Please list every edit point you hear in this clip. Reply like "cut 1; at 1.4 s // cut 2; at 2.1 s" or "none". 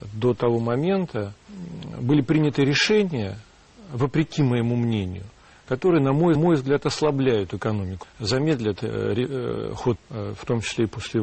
cut 1; at 1.4 s // cut 2; at 6.4 s // cut 3; at 8.0 s // cut 4; at 10.0 s